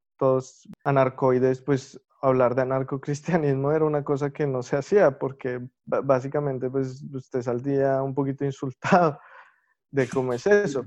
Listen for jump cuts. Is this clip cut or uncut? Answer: uncut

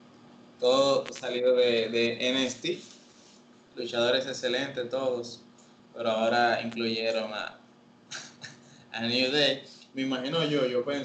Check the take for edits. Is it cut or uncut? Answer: uncut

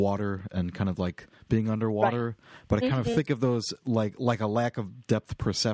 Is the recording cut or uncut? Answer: uncut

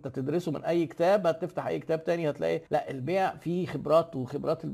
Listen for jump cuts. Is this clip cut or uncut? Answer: cut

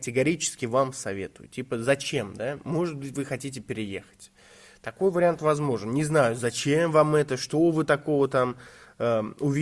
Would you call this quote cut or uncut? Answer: uncut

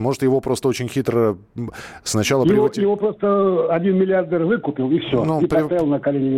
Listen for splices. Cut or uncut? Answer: uncut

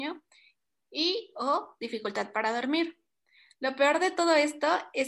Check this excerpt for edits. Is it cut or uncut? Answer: uncut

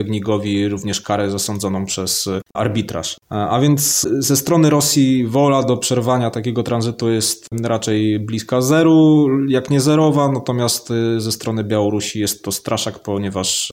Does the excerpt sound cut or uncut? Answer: uncut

